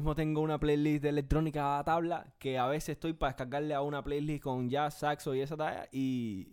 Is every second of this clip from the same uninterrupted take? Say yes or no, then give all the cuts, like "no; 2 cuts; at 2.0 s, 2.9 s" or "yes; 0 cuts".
yes; 0 cuts